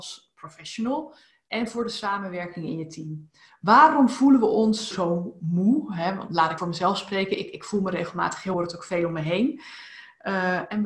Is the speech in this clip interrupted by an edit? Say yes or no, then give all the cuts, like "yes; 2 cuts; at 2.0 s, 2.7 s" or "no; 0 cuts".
yes; 3 cuts; at 4.9 s, 6.6 s, 8.5 s